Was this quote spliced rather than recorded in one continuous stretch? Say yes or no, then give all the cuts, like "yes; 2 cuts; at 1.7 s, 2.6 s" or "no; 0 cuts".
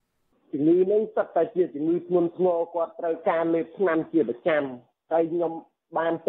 no; 0 cuts